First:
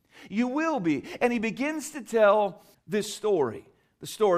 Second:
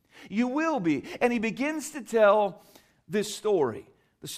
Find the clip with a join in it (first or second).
first